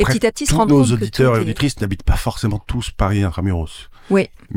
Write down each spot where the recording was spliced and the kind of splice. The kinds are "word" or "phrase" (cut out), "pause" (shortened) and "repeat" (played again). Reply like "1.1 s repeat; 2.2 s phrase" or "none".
none